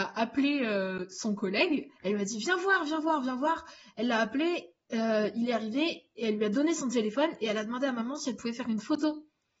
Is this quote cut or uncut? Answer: cut